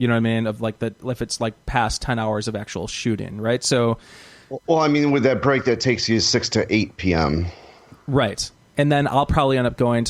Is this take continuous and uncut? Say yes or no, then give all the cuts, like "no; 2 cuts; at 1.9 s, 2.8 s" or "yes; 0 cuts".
yes; 0 cuts